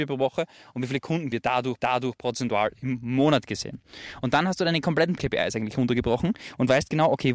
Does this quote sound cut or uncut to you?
cut